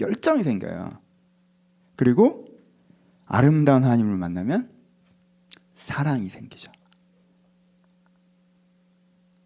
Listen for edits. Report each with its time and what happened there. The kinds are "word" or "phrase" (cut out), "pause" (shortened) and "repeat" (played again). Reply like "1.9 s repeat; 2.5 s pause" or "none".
none